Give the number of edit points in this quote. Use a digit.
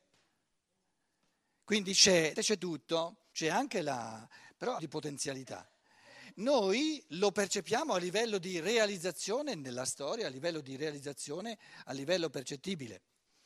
3